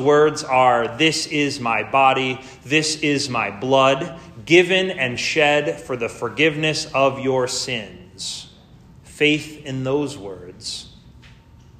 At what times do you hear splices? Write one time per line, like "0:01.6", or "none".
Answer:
none